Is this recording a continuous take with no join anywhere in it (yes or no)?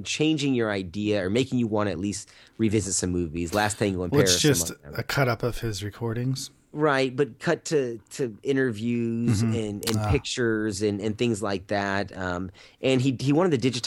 yes